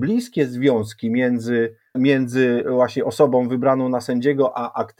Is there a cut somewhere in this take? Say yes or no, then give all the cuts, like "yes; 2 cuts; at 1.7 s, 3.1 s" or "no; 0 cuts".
yes; 1 cut; at 1.9 s